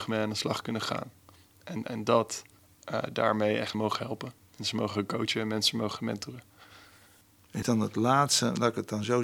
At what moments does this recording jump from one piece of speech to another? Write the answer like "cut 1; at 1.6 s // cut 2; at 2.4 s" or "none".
cut 1; at 2.6 s // cut 2; at 3.7 s // cut 3; at 4.5 s // cut 4; at 7.6 s